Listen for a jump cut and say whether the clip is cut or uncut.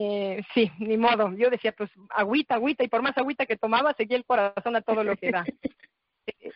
uncut